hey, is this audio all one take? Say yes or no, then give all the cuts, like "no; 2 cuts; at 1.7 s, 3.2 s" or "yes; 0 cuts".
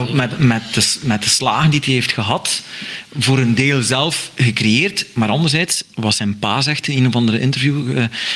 yes; 0 cuts